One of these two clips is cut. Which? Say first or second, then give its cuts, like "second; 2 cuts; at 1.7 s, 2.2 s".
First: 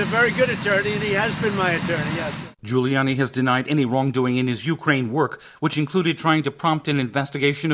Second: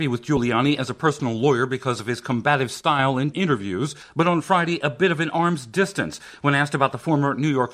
second; 1 cut; at 3.3 s